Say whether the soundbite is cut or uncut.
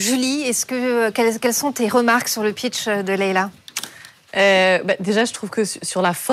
uncut